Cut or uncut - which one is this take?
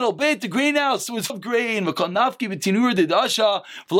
cut